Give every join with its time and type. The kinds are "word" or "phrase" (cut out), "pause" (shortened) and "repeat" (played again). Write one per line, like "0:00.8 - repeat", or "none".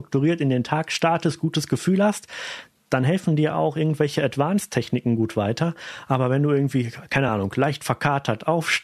none